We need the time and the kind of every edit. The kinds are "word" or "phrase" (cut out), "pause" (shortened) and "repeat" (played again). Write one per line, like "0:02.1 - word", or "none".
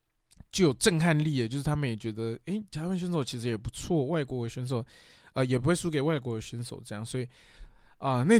none